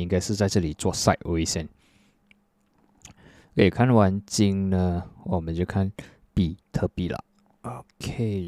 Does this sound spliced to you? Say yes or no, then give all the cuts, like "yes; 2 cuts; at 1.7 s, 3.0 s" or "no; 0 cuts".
no; 0 cuts